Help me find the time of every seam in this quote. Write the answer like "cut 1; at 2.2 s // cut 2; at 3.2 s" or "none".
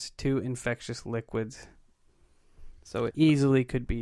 cut 1; at 3.1 s